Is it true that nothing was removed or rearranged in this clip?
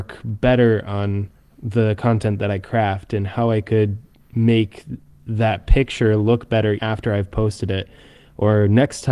no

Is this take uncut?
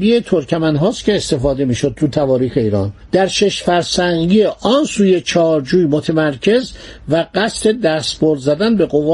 yes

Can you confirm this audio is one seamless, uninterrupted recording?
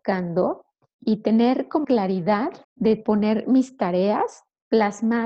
no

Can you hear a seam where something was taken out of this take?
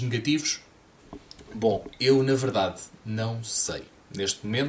no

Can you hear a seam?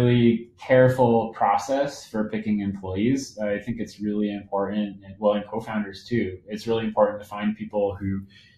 no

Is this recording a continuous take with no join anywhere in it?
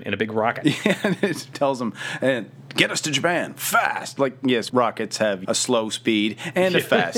no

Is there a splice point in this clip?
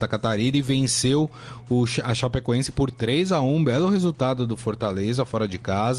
no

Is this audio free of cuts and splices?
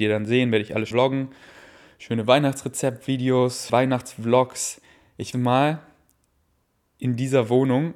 no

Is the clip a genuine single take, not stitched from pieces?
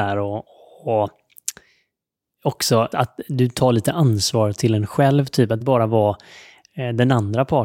no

